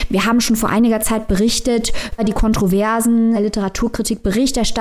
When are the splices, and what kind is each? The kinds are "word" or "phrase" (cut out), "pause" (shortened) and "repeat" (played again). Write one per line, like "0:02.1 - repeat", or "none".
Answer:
0:02.2 - word
0:03.4 - word